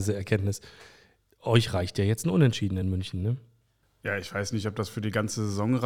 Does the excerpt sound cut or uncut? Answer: uncut